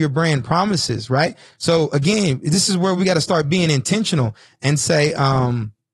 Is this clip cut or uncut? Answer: uncut